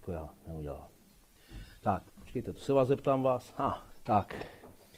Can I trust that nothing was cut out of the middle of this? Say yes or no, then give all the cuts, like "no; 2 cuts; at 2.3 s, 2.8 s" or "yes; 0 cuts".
no; 2 cuts; at 2.1 s, 3.9 s